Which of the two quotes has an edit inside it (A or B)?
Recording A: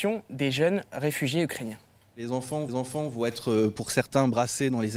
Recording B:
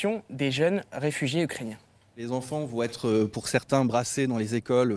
A